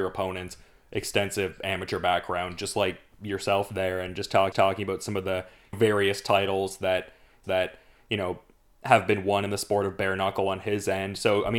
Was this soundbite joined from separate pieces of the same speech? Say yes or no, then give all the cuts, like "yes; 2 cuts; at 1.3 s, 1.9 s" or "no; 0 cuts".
yes; 3 cuts; at 4.5 s, 5.7 s, 7.4 s